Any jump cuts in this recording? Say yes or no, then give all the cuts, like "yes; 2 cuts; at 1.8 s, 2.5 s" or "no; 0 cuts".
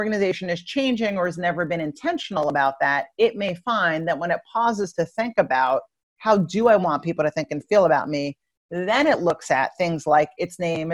no; 0 cuts